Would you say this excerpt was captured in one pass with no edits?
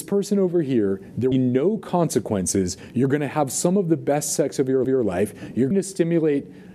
no; 3 cuts; at 1.3 s, 4.8 s, 5.7 s

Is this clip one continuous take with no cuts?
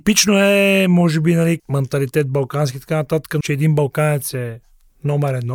no; 2 cuts; at 1.6 s, 3.4 s

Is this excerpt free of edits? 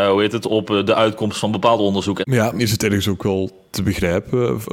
no; 1 cut; at 2.6 s

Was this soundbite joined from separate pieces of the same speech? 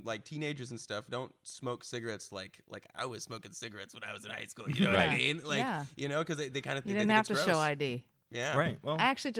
no; 0 cuts

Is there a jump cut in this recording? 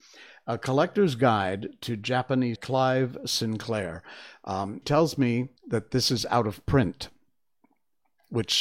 yes; 3 cuts; at 2.6 s, 4.8 s, 5.6 s

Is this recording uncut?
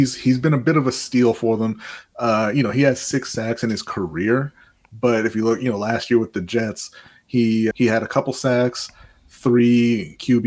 no; 1 cut; at 7.7 s

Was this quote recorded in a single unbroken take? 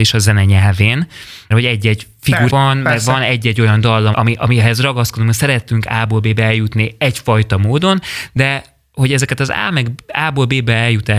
no; 3 cuts; at 1.5 s, 2.5 s, 4.1 s

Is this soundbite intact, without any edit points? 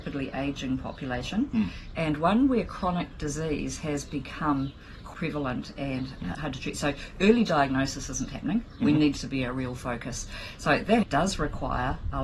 no; 4 cuts; at 5.1 s, 6.3 s, 9.2 s, 11.0 s

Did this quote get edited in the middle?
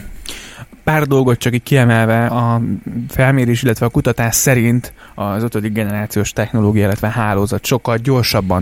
yes; 1 cut; at 2.3 s

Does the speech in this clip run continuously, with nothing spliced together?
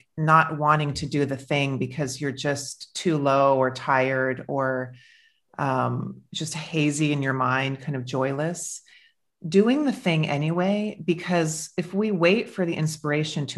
yes; 0 cuts

